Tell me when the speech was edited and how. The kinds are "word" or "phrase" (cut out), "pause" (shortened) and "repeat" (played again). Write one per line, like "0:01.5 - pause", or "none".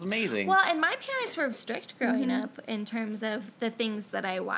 0:01.5 - word